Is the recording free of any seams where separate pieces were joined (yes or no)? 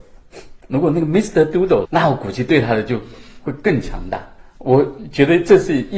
no